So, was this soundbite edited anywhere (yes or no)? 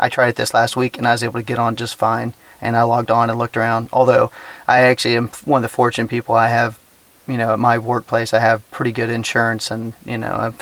no